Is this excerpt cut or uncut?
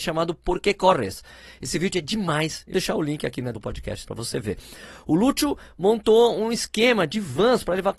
cut